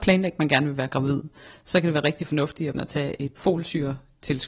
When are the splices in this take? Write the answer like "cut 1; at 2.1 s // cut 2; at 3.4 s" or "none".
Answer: cut 1; at 2.7 s // cut 2; at 3.4 s